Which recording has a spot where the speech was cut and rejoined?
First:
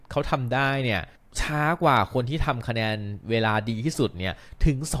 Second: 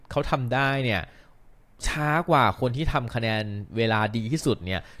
first; 1 cut; at 1.2 s

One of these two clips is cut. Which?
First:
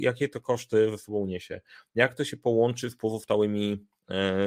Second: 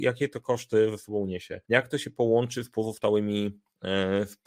second; 1 cut; at 1.6 s

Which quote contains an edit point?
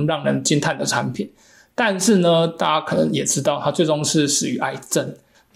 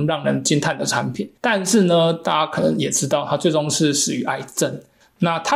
second; 1 cut; at 1.4 s

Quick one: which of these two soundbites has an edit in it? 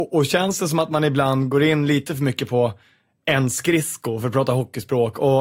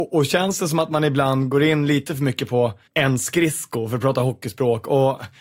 second; 1 cut; at 2.9 s

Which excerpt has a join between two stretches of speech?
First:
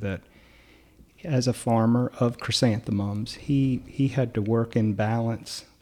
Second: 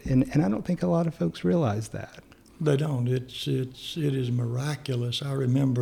first; 1 cut; at 1.1 s

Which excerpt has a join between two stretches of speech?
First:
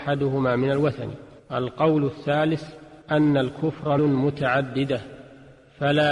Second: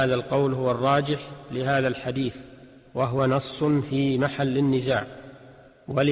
first; 3 cuts; at 1.4 s, 3.0 s, 4.0 s

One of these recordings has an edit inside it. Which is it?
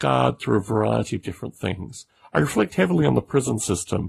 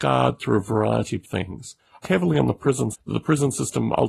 second; 3 cuts; at 1.2 s, 2.0 s, 2.9 s

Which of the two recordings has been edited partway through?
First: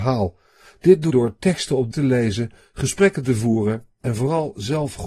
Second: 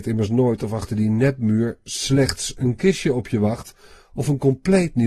first; 2 cuts; at 1.1 s, 1.9 s

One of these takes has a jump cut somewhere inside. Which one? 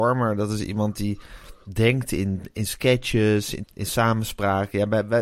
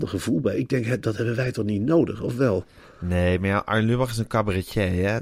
first; 1 cut; at 3.6 s

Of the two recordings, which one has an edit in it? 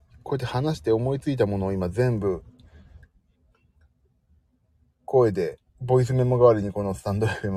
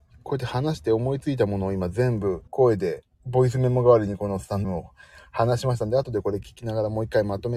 second; 2 cuts; at 2.5 s, 4.6 s

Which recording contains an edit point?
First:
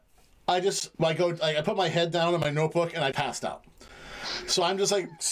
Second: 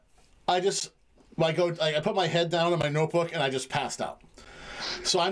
first; 2 cuts; at 0.9 s, 3.1 s

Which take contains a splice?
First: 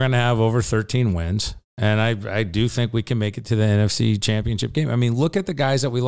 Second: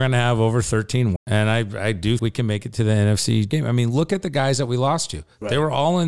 second; 3 cuts; at 1.2 s, 2.2 s, 3.5 s

